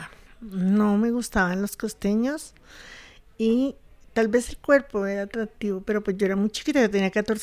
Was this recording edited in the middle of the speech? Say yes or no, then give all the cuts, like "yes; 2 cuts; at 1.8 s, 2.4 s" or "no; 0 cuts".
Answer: no; 0 cuts